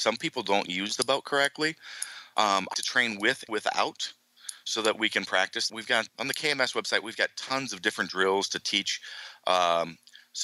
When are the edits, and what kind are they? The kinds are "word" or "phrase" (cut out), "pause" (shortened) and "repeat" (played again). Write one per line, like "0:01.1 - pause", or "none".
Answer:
0:02.7 - word
0:03.5 - word
0:05.7 - word
0:06.1 - word